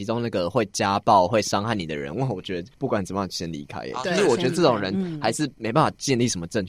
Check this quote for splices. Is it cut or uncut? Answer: uncut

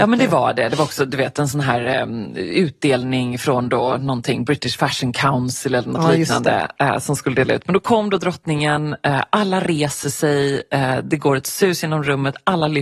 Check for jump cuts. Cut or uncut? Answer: uncut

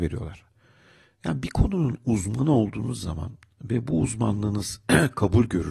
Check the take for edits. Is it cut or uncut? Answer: uncut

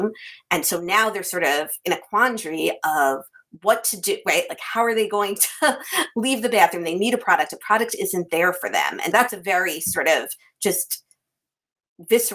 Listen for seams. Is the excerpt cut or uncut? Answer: cut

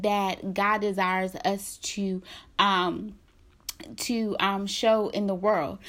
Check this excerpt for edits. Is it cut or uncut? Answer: uncut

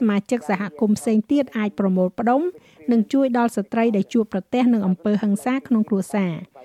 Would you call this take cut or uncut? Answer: uncut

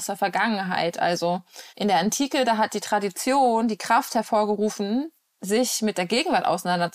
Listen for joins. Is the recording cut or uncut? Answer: cut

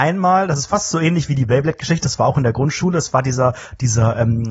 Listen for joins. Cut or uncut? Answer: uncut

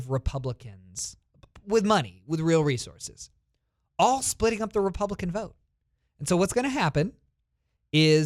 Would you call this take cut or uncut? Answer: uncut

